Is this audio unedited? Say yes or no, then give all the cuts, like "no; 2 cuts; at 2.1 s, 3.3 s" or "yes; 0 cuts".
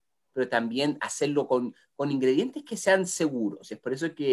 yes; 0 cuts